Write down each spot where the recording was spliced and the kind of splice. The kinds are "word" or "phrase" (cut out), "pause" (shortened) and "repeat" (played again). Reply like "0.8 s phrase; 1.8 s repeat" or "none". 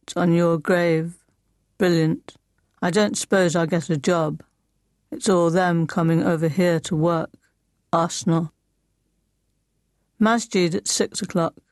2.6 s pause; 7.6 s pause